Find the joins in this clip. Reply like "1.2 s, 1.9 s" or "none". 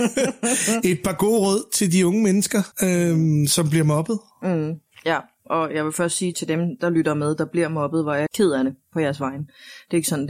2.7 s, 6.3 s, 8.3 s